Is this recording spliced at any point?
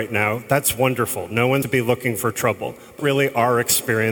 yes; 2 cuts; at 1.6 s, 3.0 s

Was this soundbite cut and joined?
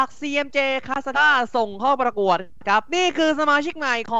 yes; 1 cut; at 1.1 s

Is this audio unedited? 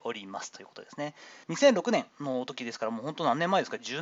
no; 2 cuts; at 1.4 s, 2.1 s

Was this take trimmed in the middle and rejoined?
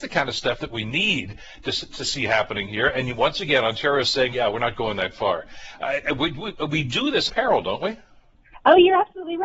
yes; 2 cuts; at 4.3 s, 7.3 s

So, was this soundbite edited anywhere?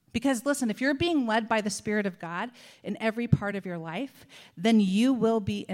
no; 0 cuts

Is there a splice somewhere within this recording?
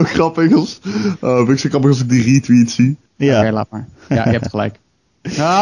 yes; 1 cut; at 3.1 s

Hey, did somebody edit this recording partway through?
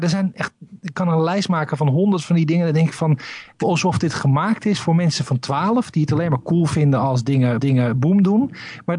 yes; 2 cuts; at 3.6 s, 7.6 s

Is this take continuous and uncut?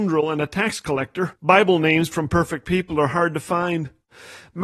no; 1 cut; at 1.4 s

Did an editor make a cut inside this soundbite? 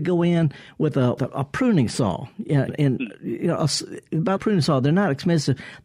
yes; 3 cuts; at 1.2 s, 2.7 s, 4.4 s

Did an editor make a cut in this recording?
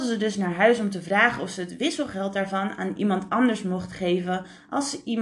no; 0 cuts

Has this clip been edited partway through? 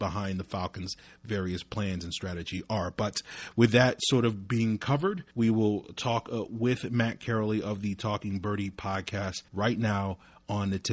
yes; 2 cuts; at 5.3 s, 9.5 s

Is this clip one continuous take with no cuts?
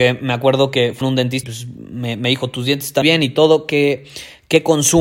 no; 3 cuts; at 1.0 s, 1.4 s, 3.0 s

